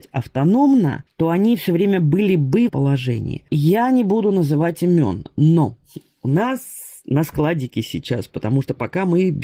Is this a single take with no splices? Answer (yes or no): no